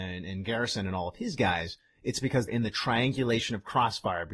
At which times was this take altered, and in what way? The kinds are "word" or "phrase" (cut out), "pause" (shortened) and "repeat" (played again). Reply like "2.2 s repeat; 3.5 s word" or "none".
2.5 s word